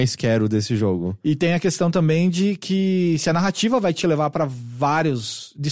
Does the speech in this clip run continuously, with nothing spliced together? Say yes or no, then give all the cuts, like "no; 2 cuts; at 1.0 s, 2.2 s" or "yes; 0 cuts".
yes; 0 cuts